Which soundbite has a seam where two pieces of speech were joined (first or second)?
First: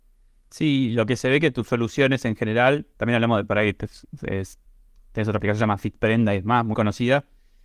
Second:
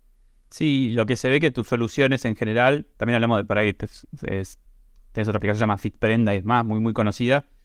first